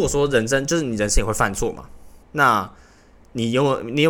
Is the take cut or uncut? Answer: cut